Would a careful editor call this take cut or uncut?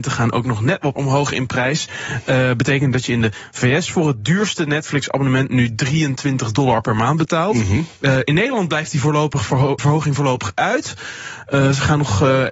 cut